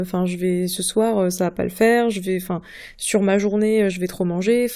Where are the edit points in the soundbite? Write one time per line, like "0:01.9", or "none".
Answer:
none